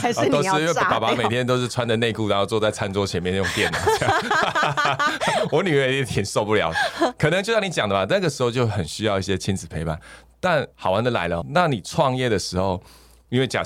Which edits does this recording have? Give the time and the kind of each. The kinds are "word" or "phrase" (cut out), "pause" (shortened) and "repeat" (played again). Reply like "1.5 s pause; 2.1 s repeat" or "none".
10.7 s pause; 11.4 s word